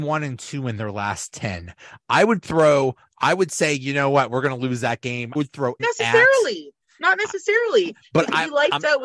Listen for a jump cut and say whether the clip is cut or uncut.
cut